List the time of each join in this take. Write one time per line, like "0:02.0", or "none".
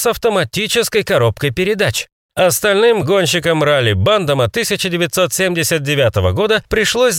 none